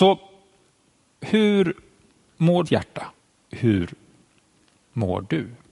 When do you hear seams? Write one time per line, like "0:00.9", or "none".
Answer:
0:02.6
0:03.2